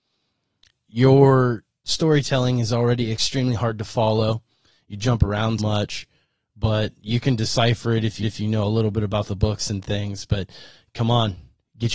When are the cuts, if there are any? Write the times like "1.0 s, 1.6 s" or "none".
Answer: 5.6 s, 8.2 s